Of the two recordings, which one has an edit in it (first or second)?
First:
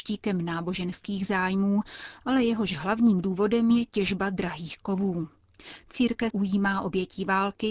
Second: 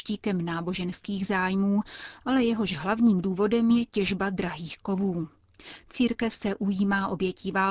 first